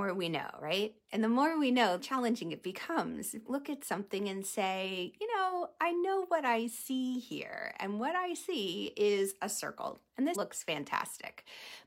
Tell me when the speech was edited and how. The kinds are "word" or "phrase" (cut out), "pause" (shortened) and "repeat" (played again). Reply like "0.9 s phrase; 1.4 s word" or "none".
2.0 s phrase; 3.5 s phrase; 10.3 s word